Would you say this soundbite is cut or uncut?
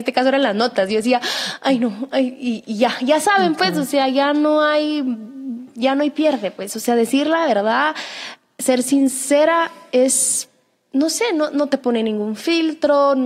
uncut